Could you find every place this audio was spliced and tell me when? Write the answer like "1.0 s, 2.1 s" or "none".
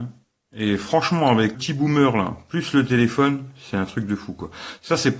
1.5 s